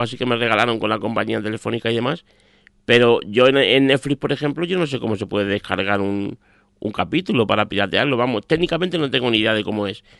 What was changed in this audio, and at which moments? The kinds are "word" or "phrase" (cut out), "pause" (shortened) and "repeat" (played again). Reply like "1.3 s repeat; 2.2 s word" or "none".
none